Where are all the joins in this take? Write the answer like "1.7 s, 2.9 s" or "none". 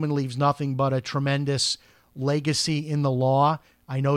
none